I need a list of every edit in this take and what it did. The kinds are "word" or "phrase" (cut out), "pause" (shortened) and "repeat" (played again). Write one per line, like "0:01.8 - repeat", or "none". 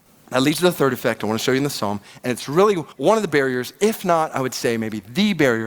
0:02.9 - pause